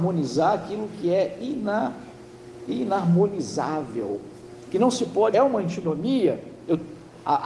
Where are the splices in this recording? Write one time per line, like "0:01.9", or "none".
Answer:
0:04.7
0:05.3